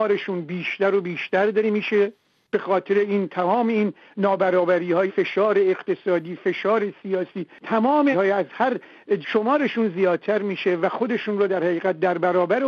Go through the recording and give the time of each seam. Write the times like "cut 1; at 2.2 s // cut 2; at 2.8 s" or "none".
cut 1; at 5.1 s // cut 2; at 8.1 s // cut 3; at 9.2 s